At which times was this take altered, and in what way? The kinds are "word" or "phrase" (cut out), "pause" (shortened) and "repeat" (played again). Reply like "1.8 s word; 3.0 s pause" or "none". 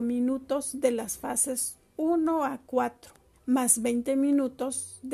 3.3 s pause